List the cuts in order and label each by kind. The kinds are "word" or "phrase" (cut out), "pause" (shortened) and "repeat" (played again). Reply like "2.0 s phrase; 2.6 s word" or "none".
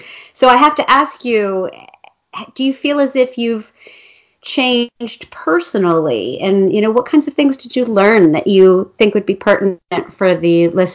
none

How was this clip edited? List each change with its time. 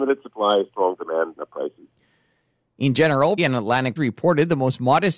1.4 s word; 3.4 s word; 4.0 s word

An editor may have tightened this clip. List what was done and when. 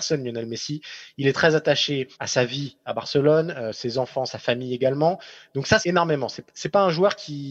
2.1 s pause; 5.8 s phrase

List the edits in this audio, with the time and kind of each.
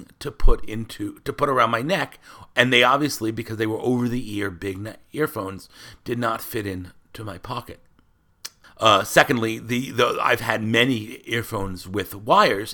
8.6 s pause

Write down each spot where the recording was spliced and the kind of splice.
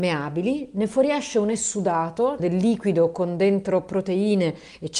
2.4 s word

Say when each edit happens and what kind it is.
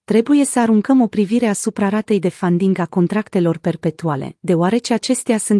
none

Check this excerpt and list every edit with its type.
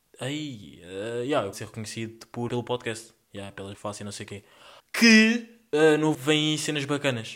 1.5 s word; 2.5 s word; 3.7 s word; 4.8 s pause; 6.1 s word

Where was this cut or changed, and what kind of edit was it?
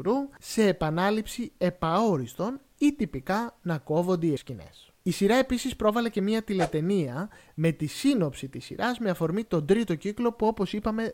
4.4 s word

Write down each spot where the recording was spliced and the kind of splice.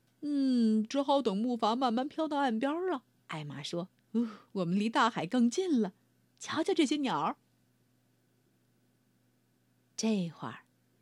3.2 s pause; 3.9 s pause; 4.5 s pause; 7.7 s pause

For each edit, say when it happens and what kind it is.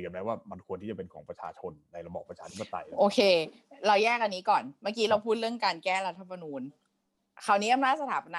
none

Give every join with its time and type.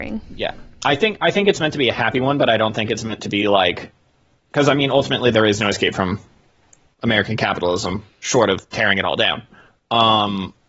none

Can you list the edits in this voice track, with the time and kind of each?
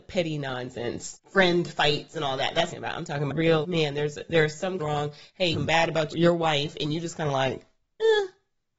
1.1 s phrase; 2.7 s phrase; 3.3 s word; 3.6 s word; 4.8 s phrase; 5.5 s phrase; 6.1 s word

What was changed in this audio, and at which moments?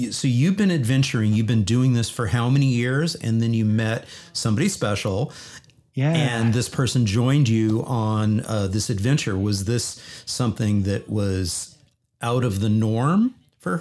none

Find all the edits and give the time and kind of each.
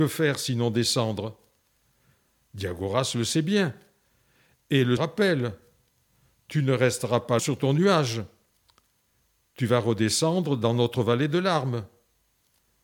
5.0 s phrase; 7.4 s word

